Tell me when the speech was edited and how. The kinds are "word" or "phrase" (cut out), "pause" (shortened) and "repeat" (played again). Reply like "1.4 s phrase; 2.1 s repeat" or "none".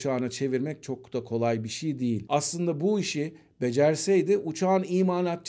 none